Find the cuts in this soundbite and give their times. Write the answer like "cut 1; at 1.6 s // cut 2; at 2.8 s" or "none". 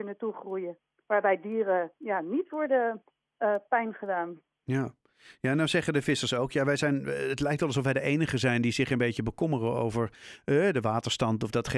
none